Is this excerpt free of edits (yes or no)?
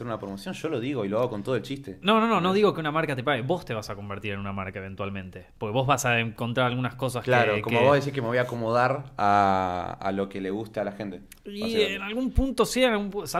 yes